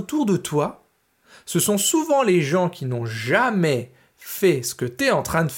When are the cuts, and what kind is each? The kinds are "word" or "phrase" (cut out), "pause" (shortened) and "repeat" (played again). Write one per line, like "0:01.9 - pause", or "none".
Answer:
none